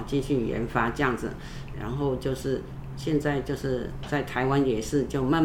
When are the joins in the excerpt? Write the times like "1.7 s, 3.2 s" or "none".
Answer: 1.7 s

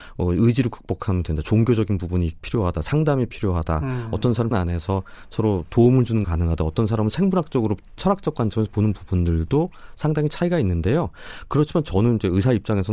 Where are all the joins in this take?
4.5 s, 6.2 s, 8.0 s

